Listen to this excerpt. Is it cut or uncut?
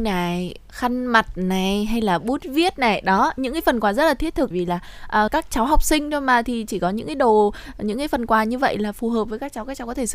cut